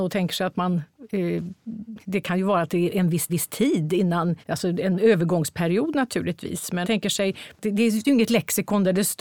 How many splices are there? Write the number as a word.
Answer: five